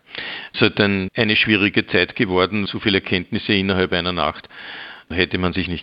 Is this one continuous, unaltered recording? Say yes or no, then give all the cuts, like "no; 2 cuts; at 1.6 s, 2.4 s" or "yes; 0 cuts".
no; 1 cut; at 2.7 s